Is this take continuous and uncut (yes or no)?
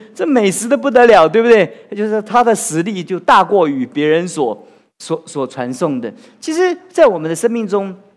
yes